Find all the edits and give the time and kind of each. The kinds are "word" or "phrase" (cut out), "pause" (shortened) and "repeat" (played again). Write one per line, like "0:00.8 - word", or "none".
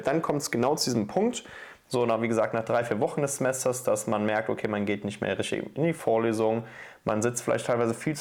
none